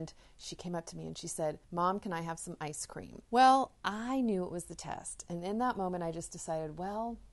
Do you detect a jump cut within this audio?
yes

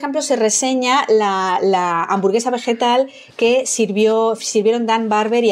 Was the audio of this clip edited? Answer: no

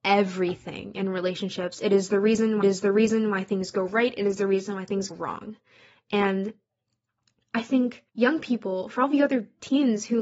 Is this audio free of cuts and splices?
no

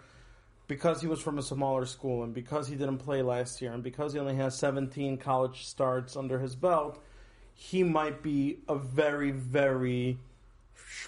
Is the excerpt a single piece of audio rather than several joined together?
yes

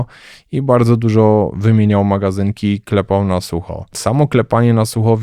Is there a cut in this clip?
no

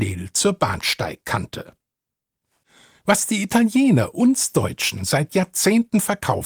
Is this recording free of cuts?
yes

